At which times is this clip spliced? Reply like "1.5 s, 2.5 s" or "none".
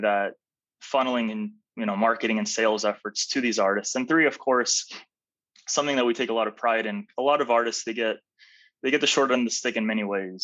none